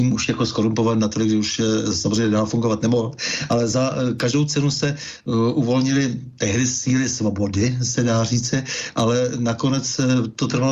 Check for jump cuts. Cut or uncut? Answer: uncut